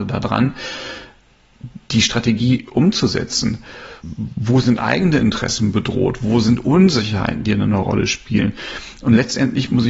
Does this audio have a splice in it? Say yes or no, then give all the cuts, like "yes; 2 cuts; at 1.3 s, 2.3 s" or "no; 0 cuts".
yes; 1 cut; at 4.0 s